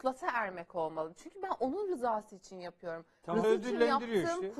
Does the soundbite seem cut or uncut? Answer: cut